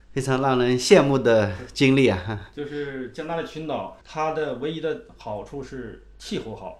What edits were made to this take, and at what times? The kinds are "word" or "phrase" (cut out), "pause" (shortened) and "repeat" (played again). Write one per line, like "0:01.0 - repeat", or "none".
0:04.0 - pause